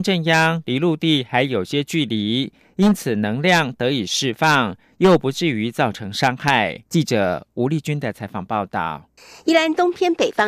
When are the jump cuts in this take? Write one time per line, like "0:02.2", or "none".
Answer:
0:06.9
0:09.2